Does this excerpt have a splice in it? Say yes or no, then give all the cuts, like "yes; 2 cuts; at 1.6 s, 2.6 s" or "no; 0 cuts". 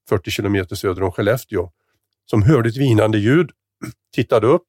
no; 0 cuts